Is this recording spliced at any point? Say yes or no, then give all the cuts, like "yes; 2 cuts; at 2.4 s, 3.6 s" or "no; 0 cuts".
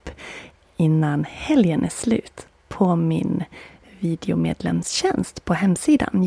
no; 0 cuts